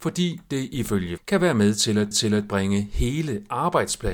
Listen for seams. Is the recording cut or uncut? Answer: cut